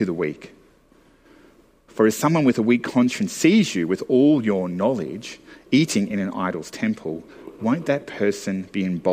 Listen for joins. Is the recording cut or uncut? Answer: uncut